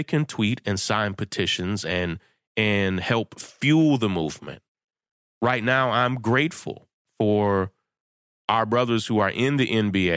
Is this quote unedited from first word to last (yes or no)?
yes